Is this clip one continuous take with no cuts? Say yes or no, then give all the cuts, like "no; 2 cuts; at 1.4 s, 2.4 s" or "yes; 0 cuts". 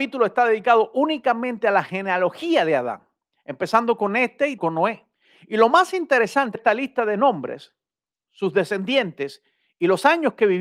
no; 2 cuts; at 4.6 s, 6.6 s